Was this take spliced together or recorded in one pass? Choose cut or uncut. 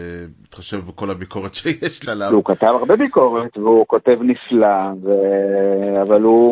cut